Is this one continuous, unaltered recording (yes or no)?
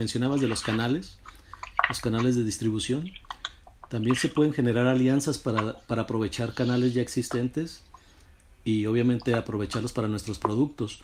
yes